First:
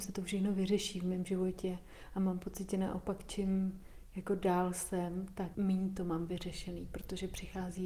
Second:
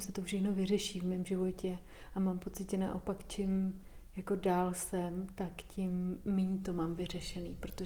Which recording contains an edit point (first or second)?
first